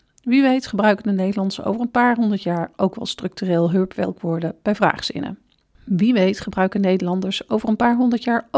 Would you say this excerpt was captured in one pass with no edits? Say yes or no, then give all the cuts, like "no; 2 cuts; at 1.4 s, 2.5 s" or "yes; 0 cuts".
yes; 0 cuts